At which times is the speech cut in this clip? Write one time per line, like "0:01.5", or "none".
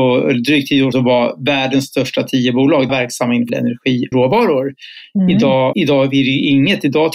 0:00.9
0:02.9
0:03.5
0:04.1
0:05.7

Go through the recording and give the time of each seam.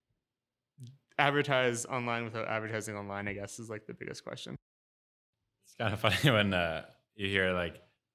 none

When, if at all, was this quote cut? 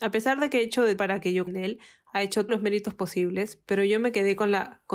0:01.0
0:01.5
0:02.5

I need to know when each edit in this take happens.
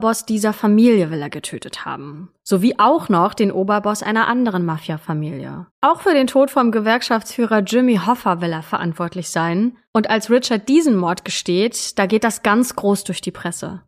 0:05.7
0:09.9

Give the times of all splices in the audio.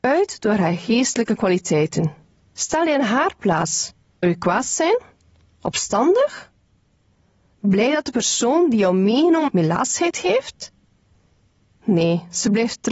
0:02.3
0:04.2
0:09.5

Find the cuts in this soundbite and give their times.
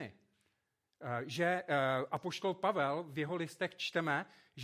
none

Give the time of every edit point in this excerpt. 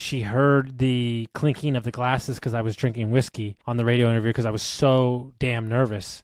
0:03.6

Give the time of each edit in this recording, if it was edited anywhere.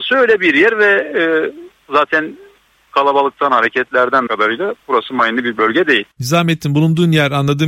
0:04.3
0:04.8
0:06.1

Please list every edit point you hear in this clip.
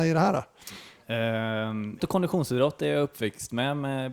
0:02.0

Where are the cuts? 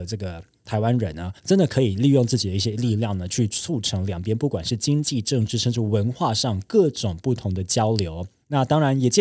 0:01.4

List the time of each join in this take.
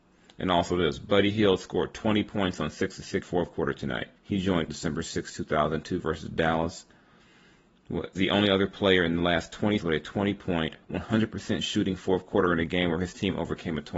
0:03.2
0:04.2
0:04.7
0:08.1
0:09.8
0:10.8

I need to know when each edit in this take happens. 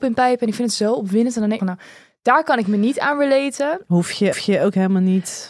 0:01.6
0:04.3

